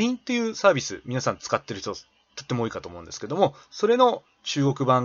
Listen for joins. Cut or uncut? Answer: uncut